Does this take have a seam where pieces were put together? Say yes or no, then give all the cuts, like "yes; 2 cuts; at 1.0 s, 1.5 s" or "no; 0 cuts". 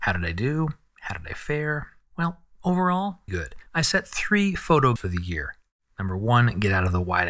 yes; 3 cuts; at 3.3 s, 3.7 s, 5.0 s